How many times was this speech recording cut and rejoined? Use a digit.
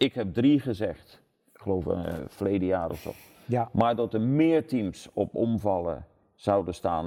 0